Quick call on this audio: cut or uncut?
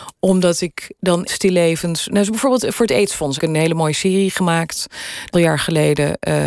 cut